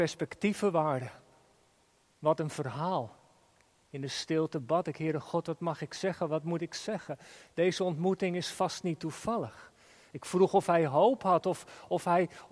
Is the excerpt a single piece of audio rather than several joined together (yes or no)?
yes